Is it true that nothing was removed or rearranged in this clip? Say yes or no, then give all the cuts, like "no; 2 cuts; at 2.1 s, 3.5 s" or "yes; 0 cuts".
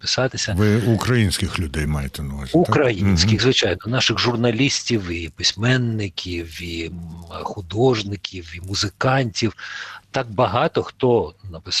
yes; 0 cuts